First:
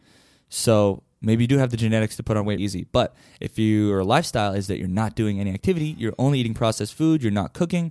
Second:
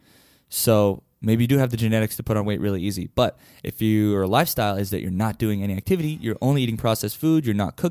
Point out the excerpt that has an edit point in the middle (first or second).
first